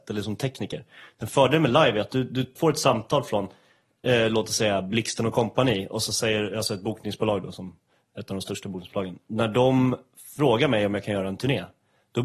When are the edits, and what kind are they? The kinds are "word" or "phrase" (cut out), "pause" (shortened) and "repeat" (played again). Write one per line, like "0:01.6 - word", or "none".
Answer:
0:02.6 - word